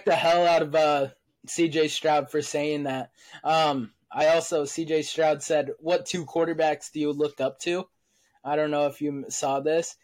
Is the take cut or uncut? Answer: uncut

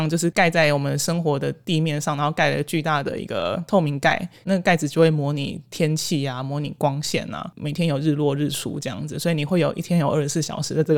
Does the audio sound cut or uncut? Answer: uncut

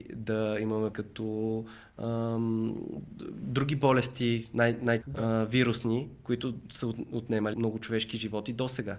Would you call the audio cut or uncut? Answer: cut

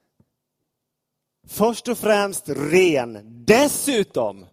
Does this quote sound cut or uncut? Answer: uncut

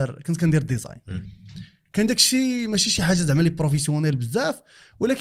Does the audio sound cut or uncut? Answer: uncut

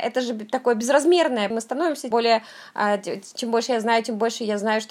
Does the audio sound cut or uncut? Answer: cut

